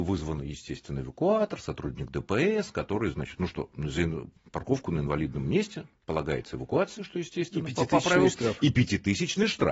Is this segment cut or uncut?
uncut